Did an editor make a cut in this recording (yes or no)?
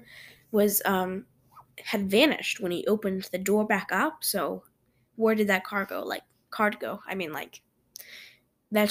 no